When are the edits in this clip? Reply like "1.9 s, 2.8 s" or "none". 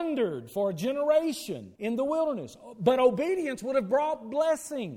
1.8 s